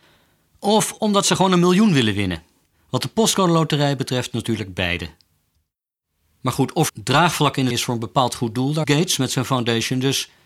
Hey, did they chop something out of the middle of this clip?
yes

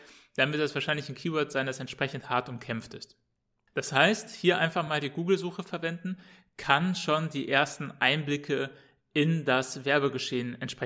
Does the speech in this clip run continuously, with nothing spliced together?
yes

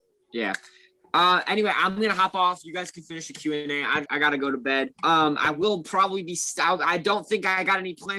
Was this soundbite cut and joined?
yes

